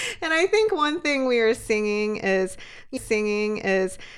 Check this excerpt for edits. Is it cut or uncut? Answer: cut